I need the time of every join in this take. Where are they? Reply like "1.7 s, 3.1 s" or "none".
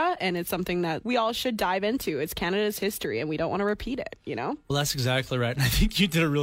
1.0 s